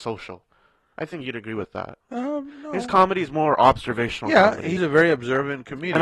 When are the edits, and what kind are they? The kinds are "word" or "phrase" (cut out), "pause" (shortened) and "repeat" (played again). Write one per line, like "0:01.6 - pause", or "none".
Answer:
0:02.0 - pause
0:04.8 - word